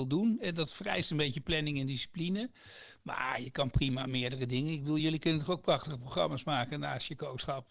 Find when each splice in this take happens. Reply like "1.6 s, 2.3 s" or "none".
none